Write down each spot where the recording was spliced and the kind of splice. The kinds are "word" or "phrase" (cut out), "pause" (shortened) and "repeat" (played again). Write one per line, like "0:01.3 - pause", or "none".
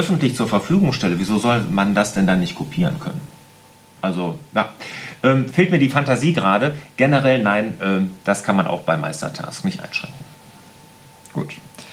none